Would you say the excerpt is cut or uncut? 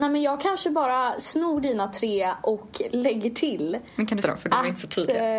cut